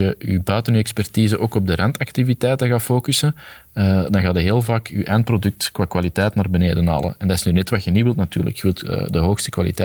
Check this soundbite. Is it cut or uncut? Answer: uncut